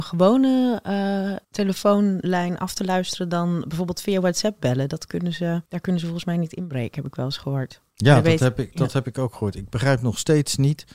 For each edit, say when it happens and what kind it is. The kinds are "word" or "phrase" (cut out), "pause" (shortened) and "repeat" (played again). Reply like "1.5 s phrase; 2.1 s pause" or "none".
1.4 s pause; 5.6 s pause